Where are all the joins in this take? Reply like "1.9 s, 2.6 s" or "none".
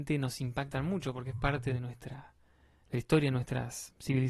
none